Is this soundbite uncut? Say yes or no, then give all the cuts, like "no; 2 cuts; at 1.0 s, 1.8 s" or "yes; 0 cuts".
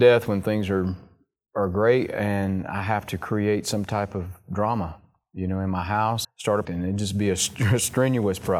no; 2 cuts; at 6.2 s, 6.6 s